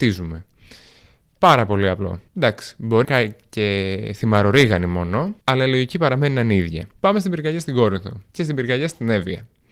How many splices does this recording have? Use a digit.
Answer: 5